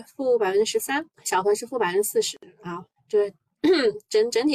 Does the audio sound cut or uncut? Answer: cut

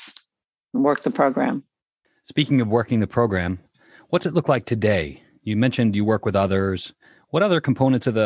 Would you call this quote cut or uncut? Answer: uncut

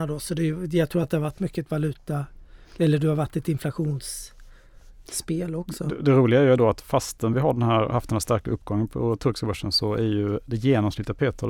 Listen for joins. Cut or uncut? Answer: uncut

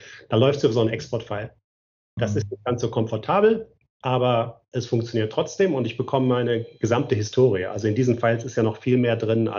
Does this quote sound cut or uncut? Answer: uncut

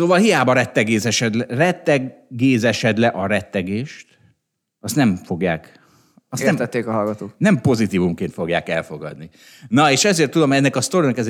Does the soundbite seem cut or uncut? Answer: uncut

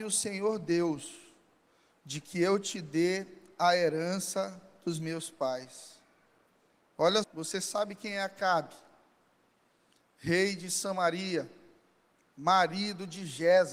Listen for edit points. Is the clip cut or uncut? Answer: cut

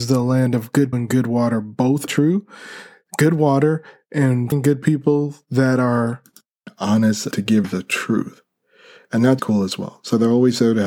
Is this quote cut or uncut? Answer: cut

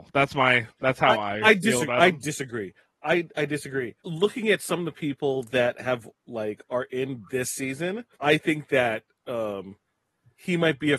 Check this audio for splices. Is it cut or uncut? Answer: cut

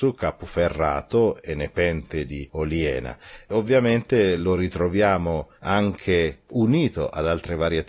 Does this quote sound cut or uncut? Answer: uncut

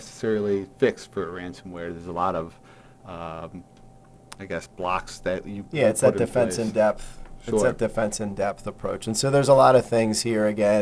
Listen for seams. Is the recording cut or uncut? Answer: uncut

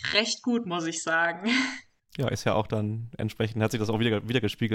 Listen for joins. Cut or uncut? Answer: cut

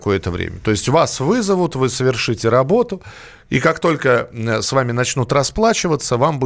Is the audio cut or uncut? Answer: uncut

